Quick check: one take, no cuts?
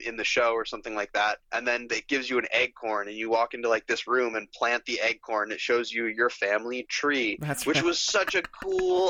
no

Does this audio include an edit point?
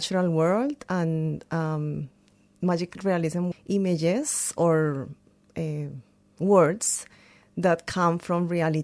yes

